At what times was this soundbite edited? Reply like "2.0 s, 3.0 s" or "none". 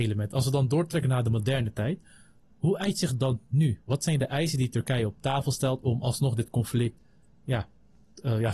none